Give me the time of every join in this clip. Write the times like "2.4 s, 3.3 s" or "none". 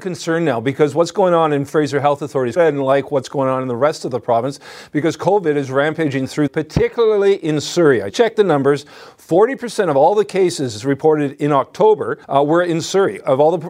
2.6 s, 6.5 s, 8.1 s, 12.2 s